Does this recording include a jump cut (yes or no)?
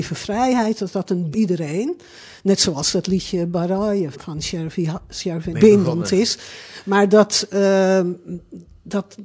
yes